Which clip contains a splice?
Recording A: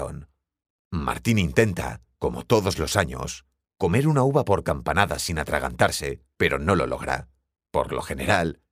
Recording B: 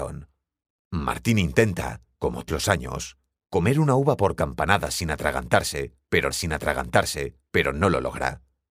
B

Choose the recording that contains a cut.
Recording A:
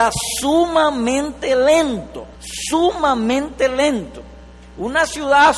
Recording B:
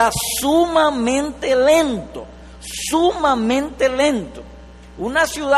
A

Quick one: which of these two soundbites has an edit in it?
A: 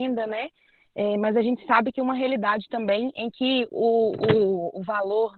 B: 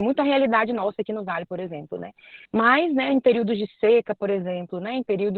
B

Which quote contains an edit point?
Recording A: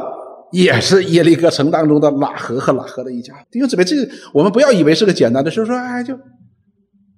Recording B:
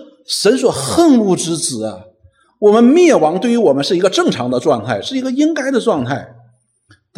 A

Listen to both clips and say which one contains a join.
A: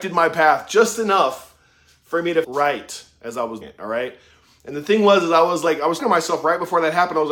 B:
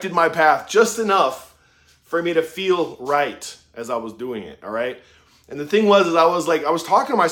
A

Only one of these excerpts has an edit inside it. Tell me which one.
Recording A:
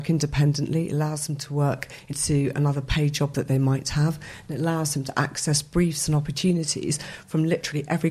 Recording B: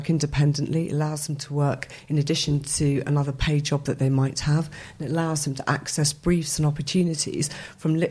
A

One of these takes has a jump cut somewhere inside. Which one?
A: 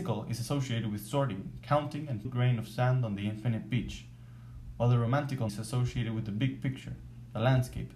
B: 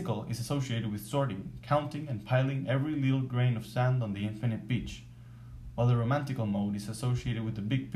A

